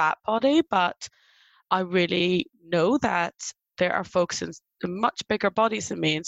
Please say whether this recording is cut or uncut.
uncut